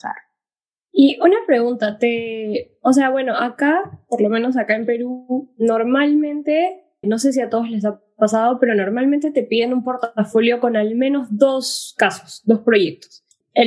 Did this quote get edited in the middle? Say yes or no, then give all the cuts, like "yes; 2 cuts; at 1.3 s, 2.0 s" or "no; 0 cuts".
yes; 1 cut; at 7.0 s